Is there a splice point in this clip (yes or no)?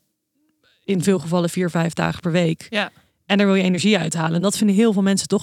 no